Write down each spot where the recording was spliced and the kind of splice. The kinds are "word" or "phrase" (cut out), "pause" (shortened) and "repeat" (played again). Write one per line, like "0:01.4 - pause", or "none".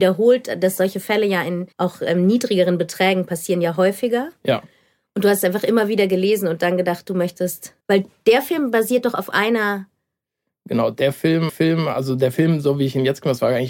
0:01.7 - pause
0:07.8 - pause
0:11.5 - repeat